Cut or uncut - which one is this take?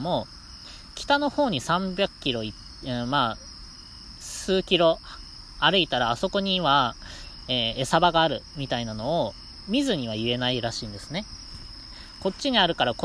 uncut